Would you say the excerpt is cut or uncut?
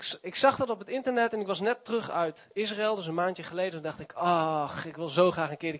uncut